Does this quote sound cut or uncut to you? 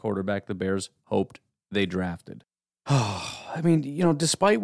uncut